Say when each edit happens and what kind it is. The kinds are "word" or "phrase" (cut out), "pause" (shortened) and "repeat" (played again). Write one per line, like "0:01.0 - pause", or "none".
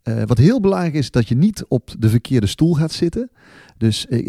none